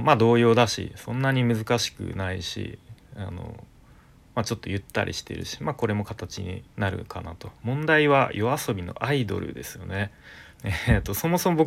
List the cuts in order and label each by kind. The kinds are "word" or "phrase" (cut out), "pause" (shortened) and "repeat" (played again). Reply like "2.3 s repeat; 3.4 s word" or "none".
6.7 s pause; 7.5 s pause; 10.5 s pause